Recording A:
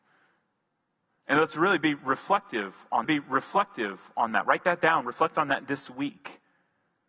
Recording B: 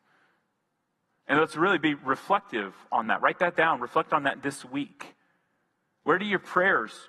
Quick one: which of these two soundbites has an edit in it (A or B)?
A